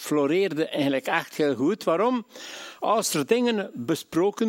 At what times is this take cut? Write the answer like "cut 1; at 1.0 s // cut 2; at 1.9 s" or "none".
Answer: none